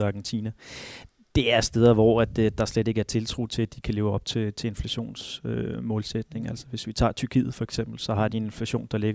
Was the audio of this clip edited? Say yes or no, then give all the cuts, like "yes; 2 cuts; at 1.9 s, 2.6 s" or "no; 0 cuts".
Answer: no; 0 cuts